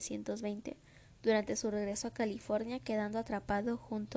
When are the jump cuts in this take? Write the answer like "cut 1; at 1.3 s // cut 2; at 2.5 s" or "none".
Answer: none

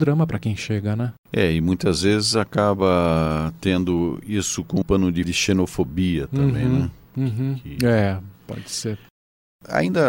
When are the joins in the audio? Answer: cut 1; at 1.2 s // cut 2; at 4.8 s // cut 3; at 5.2 s

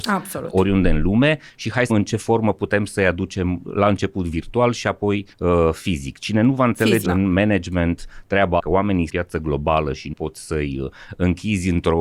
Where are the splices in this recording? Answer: cut 1; at 1.9 s // cut 2; at 5.3 s // cut 3; at 7.0 s // cut 4; at 8.6 s // cut 5; at 9.1 s // cut 6; at 10.1 s

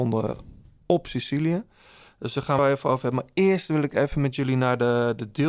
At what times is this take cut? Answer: cut 1; at 2.6 s

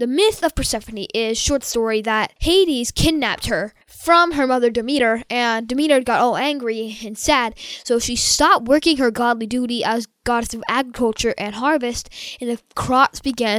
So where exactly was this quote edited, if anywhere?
cut 1; at 2.4 s // cut 2; at 3.8 s

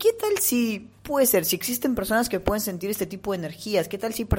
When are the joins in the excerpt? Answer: cut 1; at 1.0 s

